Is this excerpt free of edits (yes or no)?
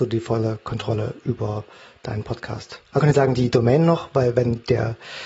no